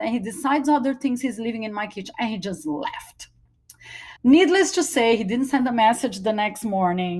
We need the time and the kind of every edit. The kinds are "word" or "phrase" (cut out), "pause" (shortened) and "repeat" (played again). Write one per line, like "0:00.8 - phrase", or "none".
0:04.2 - pause